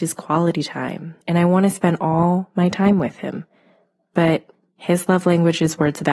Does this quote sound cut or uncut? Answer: cut